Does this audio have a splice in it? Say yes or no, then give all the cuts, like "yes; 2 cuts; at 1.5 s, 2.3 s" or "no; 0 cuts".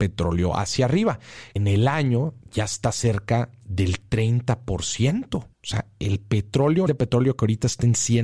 yes; 4 cuts; at 1.6 s, 2.4 s, 5.5 s, 6.9 s